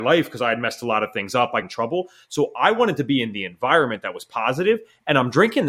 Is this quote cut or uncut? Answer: cut